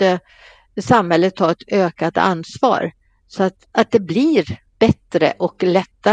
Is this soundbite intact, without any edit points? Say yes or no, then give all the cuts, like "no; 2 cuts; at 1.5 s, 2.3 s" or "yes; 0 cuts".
no; 1 cut; at 4.7 s